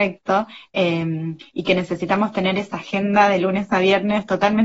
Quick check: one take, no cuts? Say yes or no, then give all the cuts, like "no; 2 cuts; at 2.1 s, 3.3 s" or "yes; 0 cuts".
yes; 0 cuts